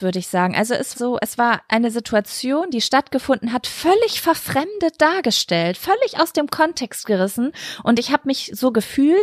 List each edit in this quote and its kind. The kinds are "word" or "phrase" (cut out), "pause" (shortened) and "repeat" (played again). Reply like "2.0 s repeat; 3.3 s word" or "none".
0.9 s word